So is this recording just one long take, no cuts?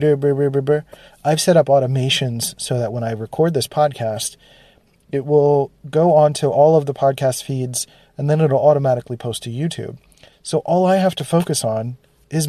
yes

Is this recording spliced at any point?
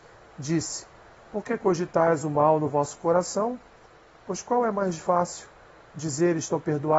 no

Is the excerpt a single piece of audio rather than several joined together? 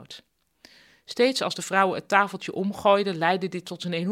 yes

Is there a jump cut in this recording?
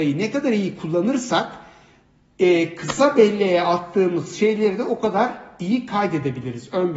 no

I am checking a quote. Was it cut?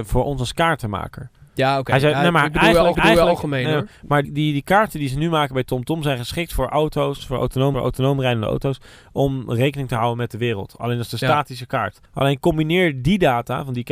yes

